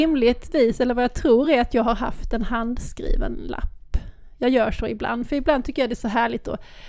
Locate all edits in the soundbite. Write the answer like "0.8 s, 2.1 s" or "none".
none